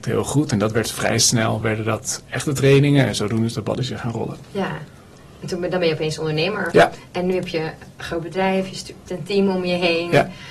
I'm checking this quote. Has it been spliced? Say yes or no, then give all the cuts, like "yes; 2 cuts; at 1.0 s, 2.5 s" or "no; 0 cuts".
no; 0 cuts